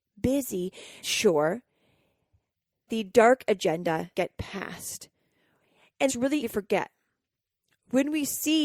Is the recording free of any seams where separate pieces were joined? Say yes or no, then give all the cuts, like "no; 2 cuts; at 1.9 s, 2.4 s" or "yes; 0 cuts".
no; 5 cuts; at 1.0 s, 2.9 s, 4.1 s, 6.1 s, 6.4 s